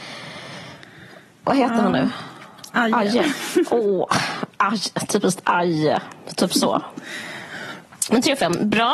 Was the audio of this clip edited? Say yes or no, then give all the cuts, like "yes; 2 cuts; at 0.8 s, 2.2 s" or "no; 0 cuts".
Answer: yes; 1 cut; at 4.5 s